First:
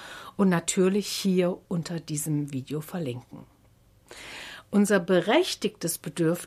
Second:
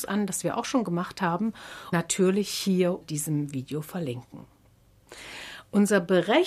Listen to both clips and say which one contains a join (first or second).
second